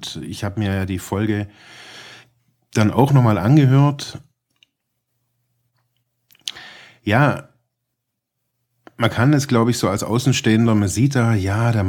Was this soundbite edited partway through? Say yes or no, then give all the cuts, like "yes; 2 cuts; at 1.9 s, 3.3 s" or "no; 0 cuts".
no; 0 cuts